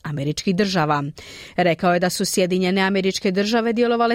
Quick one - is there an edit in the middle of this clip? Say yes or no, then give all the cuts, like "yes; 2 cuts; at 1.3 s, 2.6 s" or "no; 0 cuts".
no; 0 cuts